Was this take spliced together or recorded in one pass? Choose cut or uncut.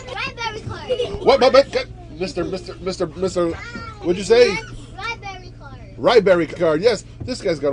cut